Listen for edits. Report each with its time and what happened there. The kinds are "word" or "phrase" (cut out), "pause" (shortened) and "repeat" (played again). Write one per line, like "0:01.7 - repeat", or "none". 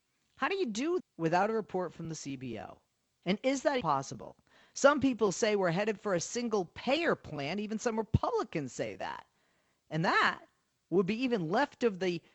0:01.0 - word
0:03.8 - word